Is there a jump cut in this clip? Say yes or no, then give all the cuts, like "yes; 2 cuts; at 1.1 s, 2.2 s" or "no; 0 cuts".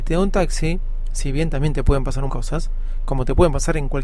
yes; 1 cut; at 2.3 s